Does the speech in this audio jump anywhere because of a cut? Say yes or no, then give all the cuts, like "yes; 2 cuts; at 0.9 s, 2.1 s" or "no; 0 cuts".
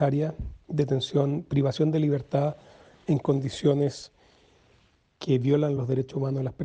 no; 0 cuts